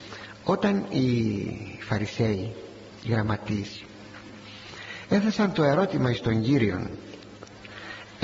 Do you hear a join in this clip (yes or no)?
no